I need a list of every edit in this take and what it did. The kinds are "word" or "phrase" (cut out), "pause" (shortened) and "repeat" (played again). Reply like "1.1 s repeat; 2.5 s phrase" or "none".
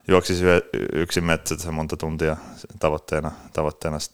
none